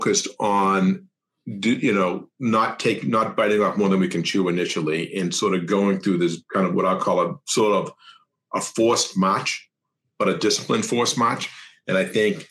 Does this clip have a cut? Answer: no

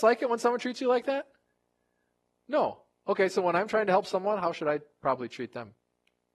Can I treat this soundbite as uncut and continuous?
yes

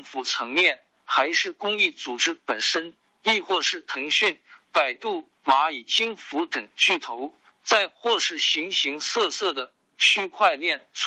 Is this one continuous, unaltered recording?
yes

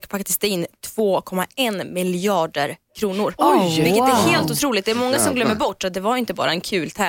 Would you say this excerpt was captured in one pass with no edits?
yes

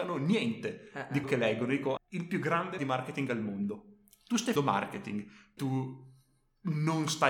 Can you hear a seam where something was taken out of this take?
yes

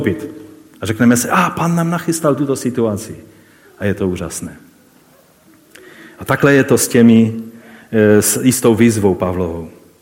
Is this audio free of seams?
yes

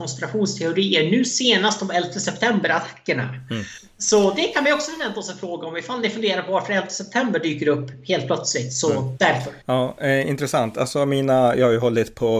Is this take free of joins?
no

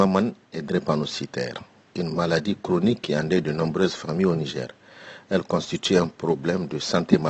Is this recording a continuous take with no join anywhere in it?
yes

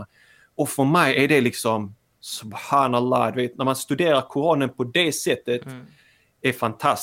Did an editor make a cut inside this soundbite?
no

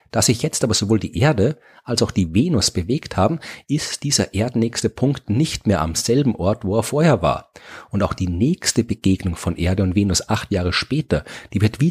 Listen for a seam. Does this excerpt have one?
no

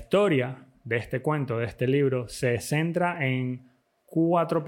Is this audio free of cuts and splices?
yes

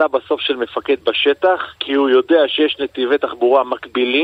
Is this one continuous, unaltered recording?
no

